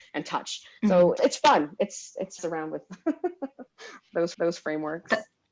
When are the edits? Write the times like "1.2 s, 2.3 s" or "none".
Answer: 1.2 s, 2.4 s, 4.3 s